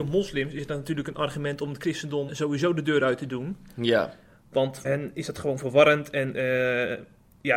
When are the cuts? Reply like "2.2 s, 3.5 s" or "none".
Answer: 2.3 s, 4.8 s